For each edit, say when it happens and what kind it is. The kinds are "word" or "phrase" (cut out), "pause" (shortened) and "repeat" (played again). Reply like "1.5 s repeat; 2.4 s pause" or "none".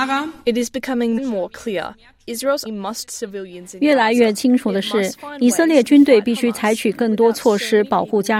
1.2 s word; 2.7 s word; 3.1 s phrase